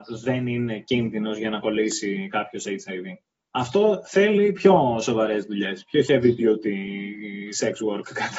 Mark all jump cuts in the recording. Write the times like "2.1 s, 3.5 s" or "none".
3.3 s